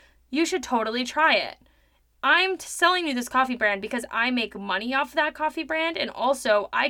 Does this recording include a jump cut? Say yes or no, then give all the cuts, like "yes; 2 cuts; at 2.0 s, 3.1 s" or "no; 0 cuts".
no; 0 cuts